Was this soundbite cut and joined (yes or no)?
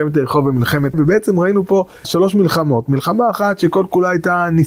yes